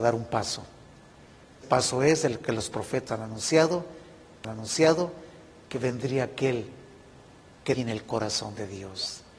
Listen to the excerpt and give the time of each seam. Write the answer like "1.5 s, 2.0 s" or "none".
1.6 s, 3.1 s, 4.4 s, 7.7 s